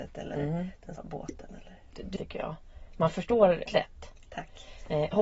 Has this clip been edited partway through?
yes; 3 cuts; at 1.0 s, 2.2 s, 3.7 s

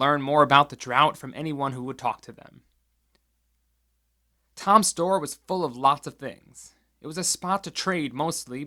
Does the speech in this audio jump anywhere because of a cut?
no; 0 cuts

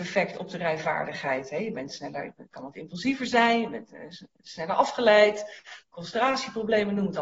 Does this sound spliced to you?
no; 0 cuts

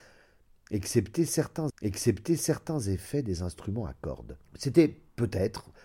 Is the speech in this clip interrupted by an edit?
yes; 2 cuts; at 1.7 s, 4.4 s

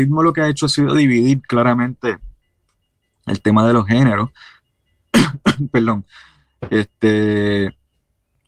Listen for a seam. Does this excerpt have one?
no; 0 cuts

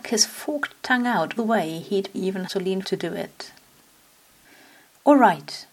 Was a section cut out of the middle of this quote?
yes; 4 cuts; at 1.4 s, 2.1 s, 2.5 s, 2.8 s

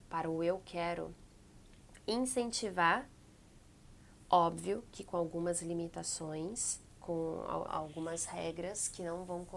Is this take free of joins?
no; 1 cut; at 7.7 s

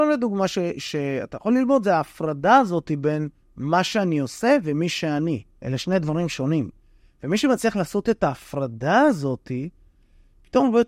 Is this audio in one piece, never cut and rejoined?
yes; 0 cuts

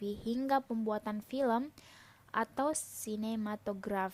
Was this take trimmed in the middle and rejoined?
no; 0 cuts

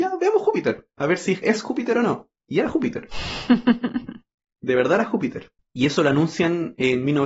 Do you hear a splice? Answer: yes; 3 cuts; at 1.4 s, 2.4 s, 5.6 s

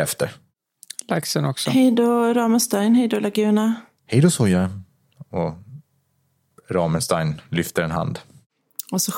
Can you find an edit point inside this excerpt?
no; 0 cuts

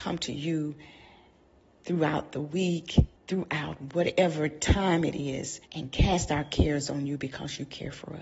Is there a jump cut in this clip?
yes; 2 cuts; at 3.2 s, 5.7 s

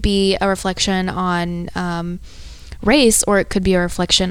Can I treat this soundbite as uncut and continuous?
yes; 0 cuts

